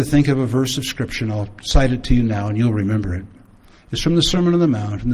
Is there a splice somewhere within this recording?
no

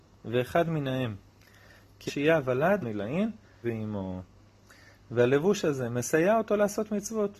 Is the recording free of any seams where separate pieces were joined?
no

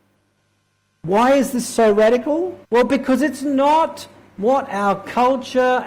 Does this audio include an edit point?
yes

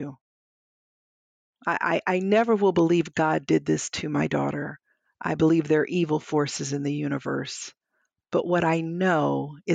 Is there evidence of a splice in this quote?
no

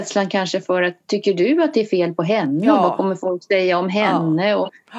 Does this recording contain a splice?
no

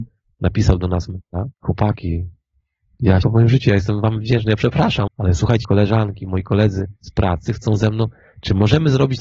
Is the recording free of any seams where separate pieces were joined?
no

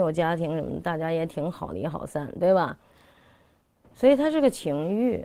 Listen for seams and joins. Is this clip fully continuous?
yes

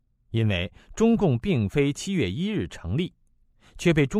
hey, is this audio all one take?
yes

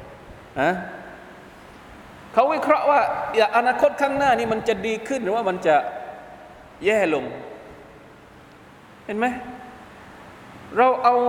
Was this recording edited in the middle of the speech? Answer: no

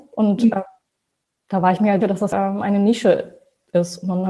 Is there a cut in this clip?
yes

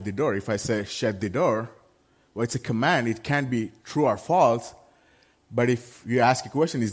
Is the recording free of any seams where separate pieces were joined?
yes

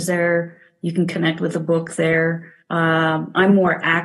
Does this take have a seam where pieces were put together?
yes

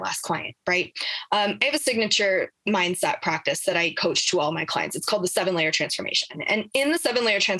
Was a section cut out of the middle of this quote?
no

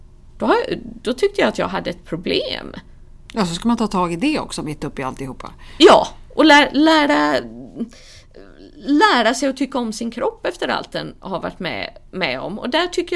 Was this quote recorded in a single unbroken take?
yes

